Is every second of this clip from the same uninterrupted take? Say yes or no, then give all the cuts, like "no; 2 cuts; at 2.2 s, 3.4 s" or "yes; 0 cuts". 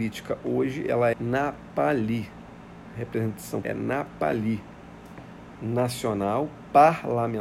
no; 2 cuts; at 1.1 s, 3.6 s